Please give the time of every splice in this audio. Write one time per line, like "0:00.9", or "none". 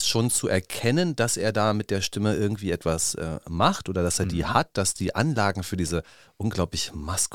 none